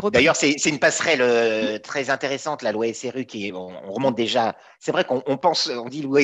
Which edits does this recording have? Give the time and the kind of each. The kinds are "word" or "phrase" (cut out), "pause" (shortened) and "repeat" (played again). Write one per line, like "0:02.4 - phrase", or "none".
none